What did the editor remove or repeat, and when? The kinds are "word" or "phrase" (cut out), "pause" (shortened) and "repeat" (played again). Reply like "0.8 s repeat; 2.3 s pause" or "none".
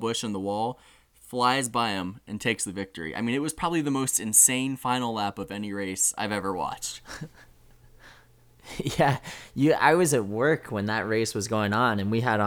none